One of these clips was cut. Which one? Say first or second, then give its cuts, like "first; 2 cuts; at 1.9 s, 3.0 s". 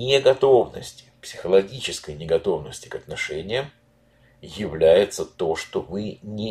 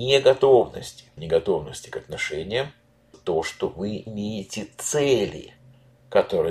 second; 3 cuts; at 1.2 s, 3.1 s, 4.1 s